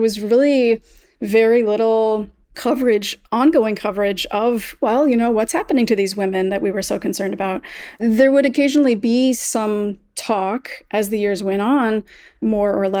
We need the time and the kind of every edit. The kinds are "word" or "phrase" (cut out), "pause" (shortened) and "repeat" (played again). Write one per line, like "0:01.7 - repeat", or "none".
none